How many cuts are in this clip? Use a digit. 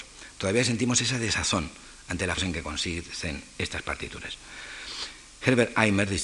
1